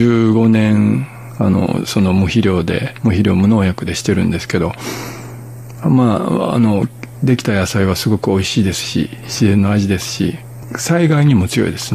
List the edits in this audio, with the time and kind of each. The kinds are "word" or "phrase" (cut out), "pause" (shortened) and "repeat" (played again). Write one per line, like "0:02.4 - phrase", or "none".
none